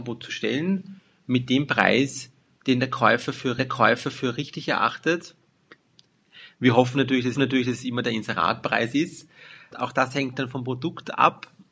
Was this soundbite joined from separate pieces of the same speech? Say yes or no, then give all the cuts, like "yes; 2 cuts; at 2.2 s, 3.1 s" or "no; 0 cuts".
yes; 2 cuts; at 3.6 s, 7.3 s